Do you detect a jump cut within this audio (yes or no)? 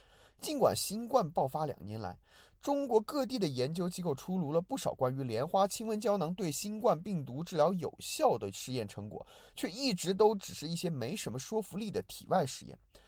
no